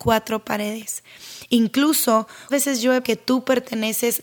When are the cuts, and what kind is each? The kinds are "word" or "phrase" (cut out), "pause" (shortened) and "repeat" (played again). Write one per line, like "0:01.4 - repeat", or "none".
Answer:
0:02.5 - word
0:03.0 - word